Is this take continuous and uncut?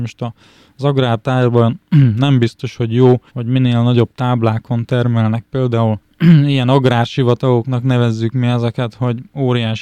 no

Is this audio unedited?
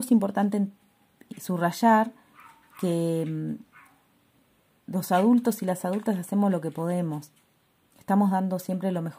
yes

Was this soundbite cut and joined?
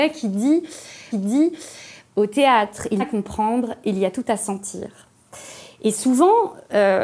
yes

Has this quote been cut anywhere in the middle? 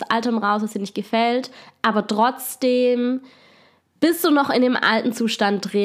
no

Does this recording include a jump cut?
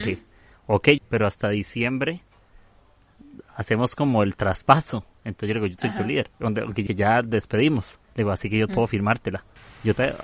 yes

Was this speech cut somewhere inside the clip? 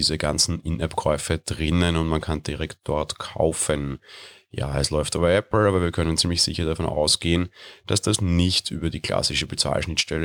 no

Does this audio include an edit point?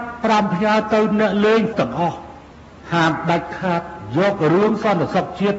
yes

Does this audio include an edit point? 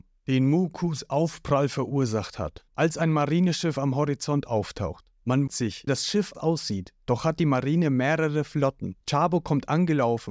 yes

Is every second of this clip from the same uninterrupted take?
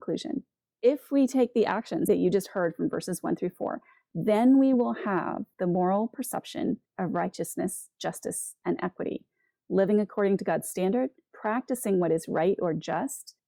yes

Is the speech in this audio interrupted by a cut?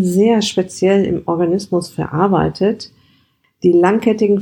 no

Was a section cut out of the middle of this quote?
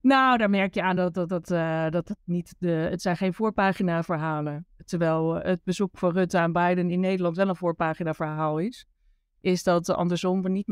no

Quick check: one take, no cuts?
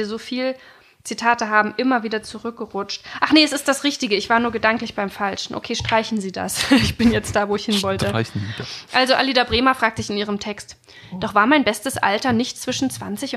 yes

